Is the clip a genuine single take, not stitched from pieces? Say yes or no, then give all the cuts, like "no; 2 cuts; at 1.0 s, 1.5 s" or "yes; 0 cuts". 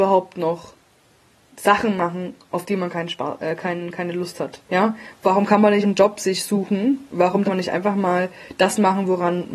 no; 4 cuts; at 1.1 s, 4.7 s, 5.8 s, 7.4 s